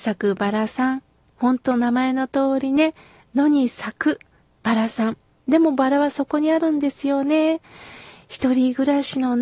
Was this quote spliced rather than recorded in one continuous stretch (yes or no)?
no